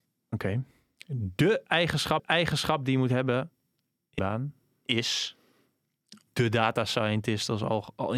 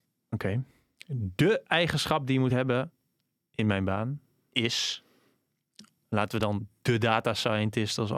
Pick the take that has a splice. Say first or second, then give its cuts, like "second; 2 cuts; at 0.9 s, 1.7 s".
first; 3 cuts; at 2.2 s, 4.2 s, 6.3 s